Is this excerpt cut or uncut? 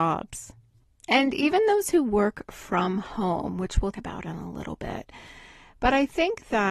cut